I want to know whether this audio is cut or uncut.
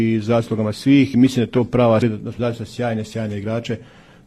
cut